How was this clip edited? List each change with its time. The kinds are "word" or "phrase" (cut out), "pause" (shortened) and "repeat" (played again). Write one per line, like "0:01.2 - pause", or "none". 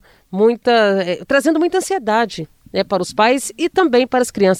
none